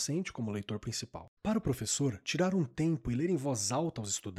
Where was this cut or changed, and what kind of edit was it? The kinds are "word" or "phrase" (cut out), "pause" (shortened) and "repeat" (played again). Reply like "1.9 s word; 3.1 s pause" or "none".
1.4 s pause